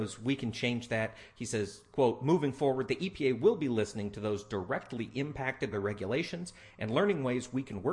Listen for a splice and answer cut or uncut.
cut